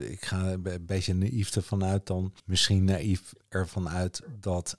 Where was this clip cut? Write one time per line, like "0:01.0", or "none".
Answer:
0:02.4